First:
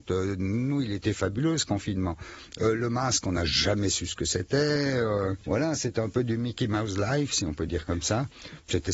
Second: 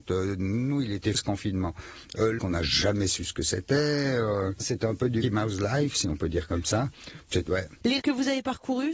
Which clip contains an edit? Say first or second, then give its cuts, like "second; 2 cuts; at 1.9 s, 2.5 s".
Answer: second; 6 cuts; at 1.1 s, 2.4 s, 4.6 s, 5.2 s, 7.5 s, 8.0 s